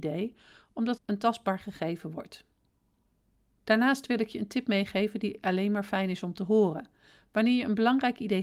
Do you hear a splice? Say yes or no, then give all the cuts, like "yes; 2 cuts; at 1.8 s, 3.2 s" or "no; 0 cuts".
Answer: yes; 1 cut; at 1.0 s